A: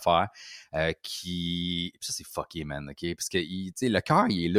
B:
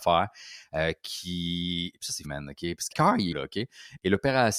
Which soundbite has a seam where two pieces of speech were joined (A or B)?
B